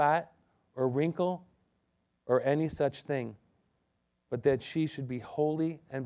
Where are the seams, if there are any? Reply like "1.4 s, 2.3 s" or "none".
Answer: none